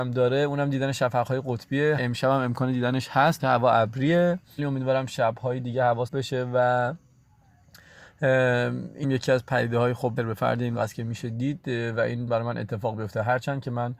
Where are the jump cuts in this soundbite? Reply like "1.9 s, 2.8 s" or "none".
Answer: 2.0 s, 3.4 s, 4.6 s, 6.1 s, 9.0 s, 10.2 s, 10.8 s, 12.3 s